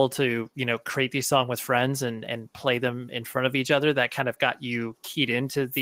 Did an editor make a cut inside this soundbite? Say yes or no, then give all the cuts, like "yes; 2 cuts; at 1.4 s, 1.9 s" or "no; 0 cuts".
no; 0 cuts